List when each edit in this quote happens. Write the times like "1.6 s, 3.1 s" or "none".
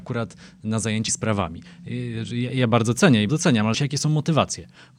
1.1 s, 3.3 s, 3.7 s